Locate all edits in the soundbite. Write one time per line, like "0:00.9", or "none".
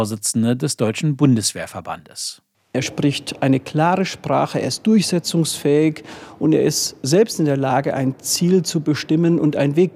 none